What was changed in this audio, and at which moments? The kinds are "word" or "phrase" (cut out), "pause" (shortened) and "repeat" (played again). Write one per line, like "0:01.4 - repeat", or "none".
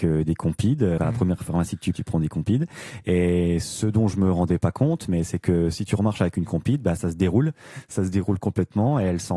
0:01.0 - word
0:01.9 - word

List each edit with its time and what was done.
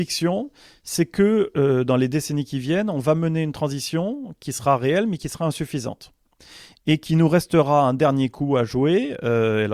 none

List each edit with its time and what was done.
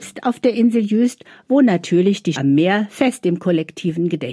0:02.4 - word

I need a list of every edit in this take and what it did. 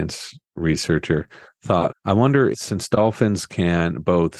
0:01.9 - word
0:02.5 - word

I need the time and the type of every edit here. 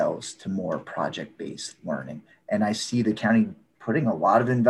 none

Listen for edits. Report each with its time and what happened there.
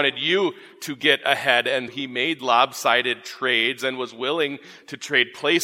0:01.9 - word
0:02.4 - word

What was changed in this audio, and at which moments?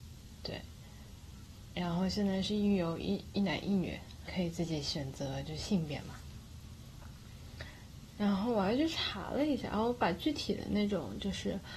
0:04.3 - phrase

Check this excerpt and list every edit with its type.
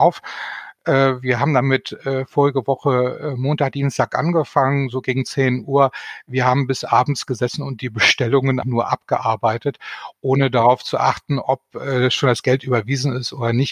0:08.6 - word

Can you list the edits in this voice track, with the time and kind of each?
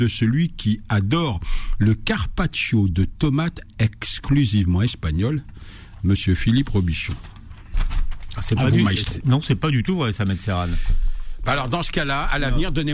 none

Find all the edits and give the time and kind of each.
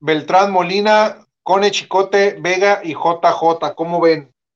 none

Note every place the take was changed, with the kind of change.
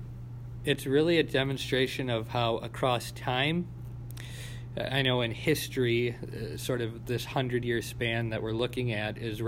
none

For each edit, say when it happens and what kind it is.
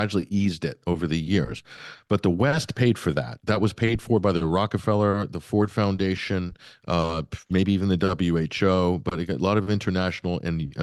none

